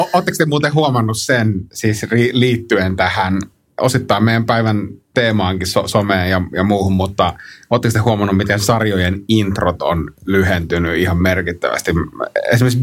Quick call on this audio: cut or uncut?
uncut